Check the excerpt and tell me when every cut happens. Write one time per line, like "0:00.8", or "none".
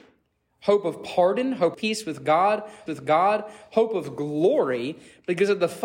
0:01.7
0:02.9